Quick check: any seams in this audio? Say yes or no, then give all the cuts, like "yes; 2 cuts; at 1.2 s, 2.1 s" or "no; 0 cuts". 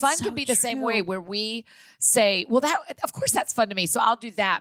no; 0 cuts